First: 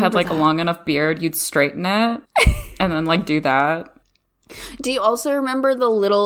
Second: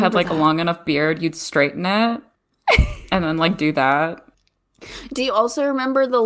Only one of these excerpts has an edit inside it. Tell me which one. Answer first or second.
first